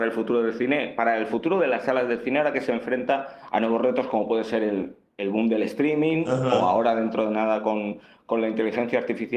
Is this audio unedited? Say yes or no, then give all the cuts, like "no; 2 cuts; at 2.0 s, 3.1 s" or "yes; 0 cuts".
yes; 0 cuts